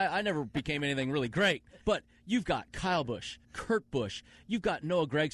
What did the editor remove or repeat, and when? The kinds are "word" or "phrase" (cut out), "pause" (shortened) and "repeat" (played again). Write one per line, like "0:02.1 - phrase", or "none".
0:01.8 - pause
0:03.4 - pause